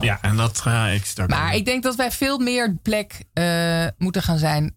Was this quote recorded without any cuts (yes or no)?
no